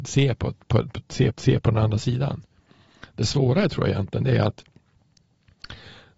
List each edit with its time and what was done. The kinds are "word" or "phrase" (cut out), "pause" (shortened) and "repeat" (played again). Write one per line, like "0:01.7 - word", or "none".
0:01.3 - repeat